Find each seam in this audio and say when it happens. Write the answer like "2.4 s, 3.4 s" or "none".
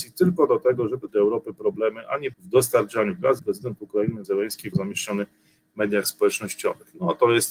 1.1 s, 2.3 s, 3.4 s, 4.2 s, 4.7 s